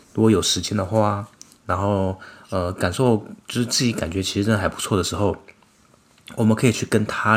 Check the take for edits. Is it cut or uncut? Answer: uncut